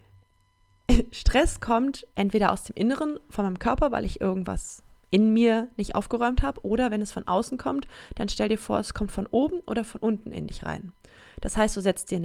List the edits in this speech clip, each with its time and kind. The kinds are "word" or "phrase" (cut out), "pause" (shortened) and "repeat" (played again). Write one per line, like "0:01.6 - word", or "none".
none